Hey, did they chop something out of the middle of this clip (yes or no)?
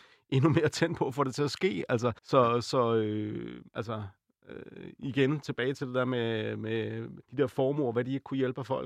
yes